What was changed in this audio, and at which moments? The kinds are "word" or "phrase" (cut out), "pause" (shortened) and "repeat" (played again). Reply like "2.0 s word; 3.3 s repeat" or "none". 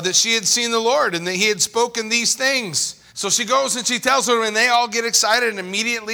3.1 s pause